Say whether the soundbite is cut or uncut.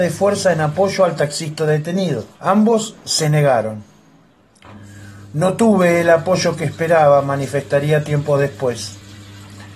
cut